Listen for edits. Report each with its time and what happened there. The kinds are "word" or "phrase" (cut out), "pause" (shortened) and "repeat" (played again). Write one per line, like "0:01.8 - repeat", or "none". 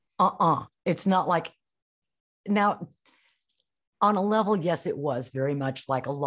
none